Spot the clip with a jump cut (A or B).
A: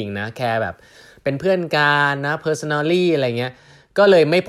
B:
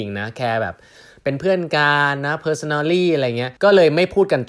B